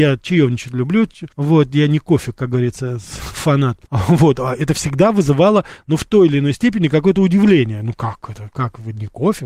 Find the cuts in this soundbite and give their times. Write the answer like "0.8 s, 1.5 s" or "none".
1.3 s, 3.9 s